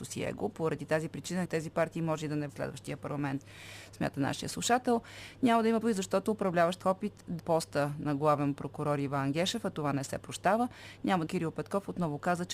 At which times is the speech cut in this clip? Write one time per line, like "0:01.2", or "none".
0:01.4
0:02.5
0:05.8
0:06.8
0:07.4
0:11.3